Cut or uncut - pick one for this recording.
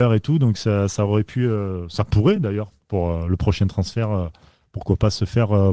uncut